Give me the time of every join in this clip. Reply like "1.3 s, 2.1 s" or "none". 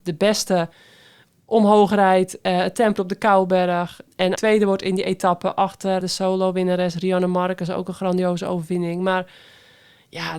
3.0 s, 4.3 s, 6.0 s